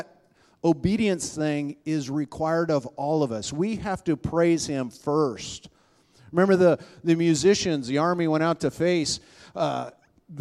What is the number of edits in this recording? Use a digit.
0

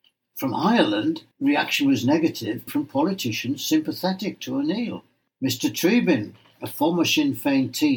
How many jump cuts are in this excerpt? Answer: 3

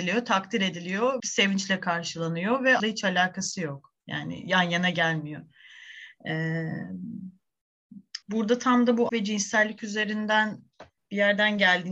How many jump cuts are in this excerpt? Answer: 6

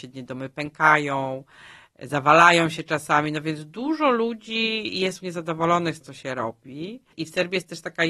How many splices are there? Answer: 2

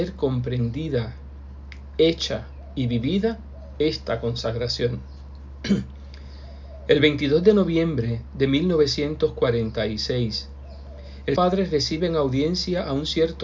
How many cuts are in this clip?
1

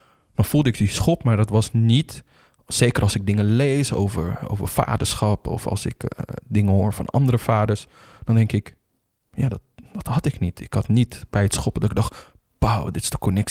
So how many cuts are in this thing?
0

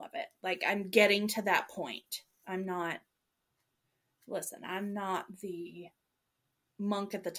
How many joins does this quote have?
0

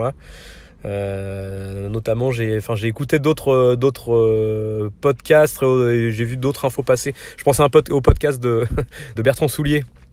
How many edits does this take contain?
1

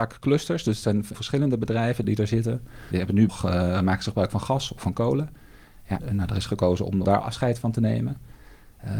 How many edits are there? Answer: 4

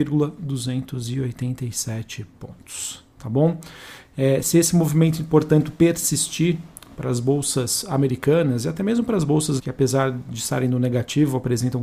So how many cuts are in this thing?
1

